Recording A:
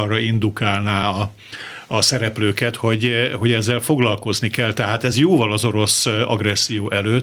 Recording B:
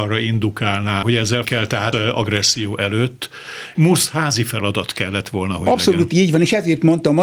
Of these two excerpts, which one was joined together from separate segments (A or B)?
B